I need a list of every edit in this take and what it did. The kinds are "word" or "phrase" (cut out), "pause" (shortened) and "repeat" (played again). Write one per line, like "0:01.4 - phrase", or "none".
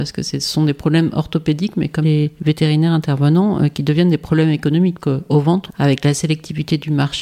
0:02.0 - word
0:05.0 - word
0:05.7 - phrase